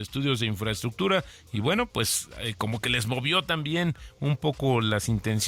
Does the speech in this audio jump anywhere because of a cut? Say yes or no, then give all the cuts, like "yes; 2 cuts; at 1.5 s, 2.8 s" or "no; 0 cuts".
no; 0 cuts